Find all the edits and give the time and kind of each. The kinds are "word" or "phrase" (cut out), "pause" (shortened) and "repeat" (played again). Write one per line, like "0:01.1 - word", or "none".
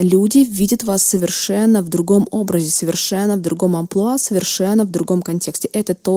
none